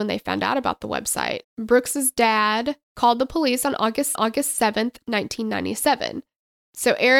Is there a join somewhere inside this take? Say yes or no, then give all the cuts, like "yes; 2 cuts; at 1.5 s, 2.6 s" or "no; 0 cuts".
yes; 3 cuts; at 1.4 s, 2.8 s, 4.2 s